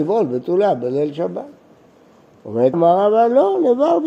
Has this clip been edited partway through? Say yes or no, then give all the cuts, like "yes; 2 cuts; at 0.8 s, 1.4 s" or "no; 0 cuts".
yes; 1 cut; at 2.7 s